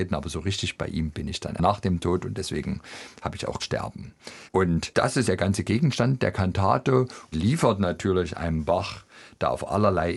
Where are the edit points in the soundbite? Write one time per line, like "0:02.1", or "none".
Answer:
0:01.6
0:03.6
0:04.5
0:05.2
0:07.3